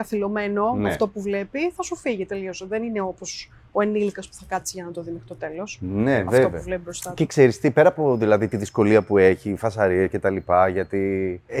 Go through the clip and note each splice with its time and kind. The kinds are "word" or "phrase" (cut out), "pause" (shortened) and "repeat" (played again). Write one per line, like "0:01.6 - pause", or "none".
none